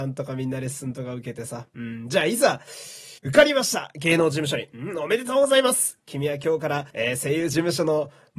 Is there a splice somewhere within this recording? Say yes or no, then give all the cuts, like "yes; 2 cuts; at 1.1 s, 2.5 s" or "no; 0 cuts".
yes; 2 cuts; at 3.2 s, 6.9 s